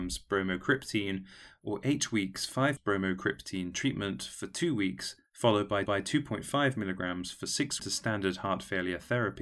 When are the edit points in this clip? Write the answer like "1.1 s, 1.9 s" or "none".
2.8 s, 5.9 s, 7.8 s